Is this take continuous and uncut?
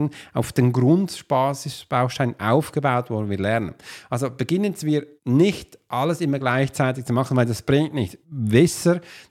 no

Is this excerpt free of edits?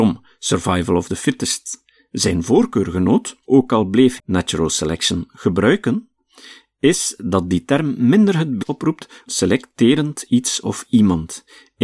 no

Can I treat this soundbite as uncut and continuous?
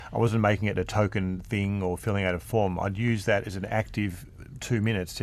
yes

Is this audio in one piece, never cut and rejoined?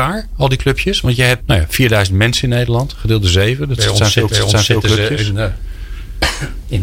no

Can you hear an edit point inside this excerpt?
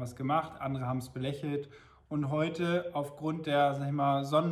no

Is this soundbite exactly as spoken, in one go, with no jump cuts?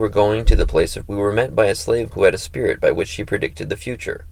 no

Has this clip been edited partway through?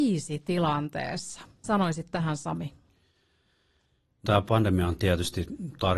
yes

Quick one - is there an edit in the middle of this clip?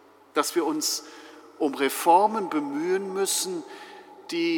no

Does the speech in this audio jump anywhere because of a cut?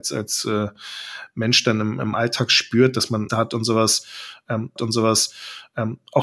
yes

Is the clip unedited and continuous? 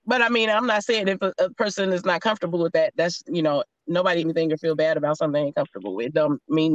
no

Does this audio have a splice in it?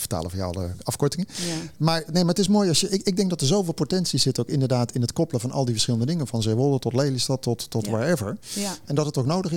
no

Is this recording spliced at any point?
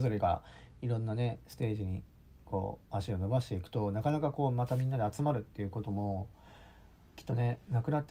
no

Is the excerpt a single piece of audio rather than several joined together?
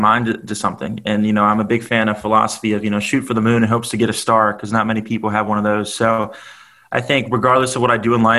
yes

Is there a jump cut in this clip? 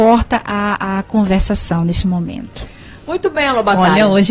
no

